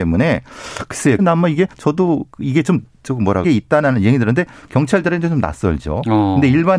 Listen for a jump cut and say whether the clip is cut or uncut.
cut